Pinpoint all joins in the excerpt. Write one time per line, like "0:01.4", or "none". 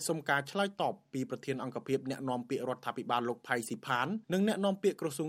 0:04.2